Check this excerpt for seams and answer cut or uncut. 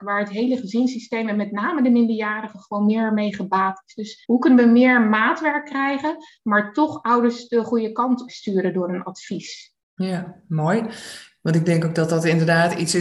cut